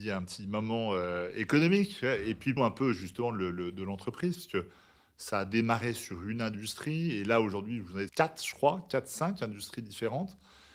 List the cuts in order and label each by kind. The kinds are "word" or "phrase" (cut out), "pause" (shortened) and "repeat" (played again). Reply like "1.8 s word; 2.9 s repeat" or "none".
2.6 s word; 8.1 s word